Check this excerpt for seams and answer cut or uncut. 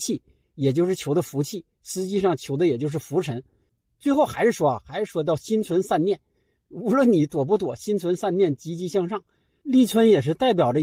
uncut